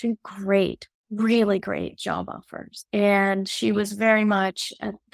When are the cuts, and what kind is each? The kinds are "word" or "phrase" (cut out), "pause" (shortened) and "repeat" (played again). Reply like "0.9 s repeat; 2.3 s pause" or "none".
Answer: 2.9 s pause